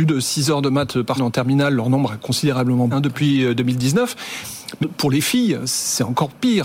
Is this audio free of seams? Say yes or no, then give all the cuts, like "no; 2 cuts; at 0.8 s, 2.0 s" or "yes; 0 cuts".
no; 3 cuts; at 1.2 s, 2.9 s, 4.8 s